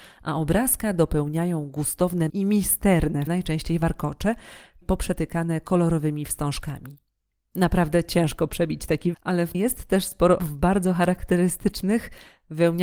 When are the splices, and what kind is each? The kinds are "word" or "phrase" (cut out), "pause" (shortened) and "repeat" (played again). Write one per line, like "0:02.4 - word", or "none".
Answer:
0:02.3 - word
0:03.3 - word
0:04.8 - word
0:09.1 - word
0:09.5 - word
0:10.4 - word